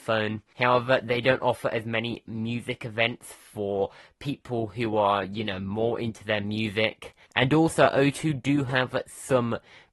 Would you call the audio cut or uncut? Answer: uncut